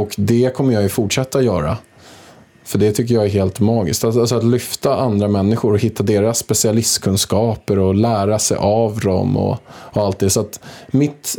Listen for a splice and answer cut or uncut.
uncut